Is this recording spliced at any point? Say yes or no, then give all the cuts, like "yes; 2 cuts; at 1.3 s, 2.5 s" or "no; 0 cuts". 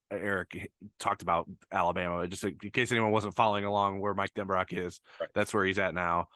no; 0 cuts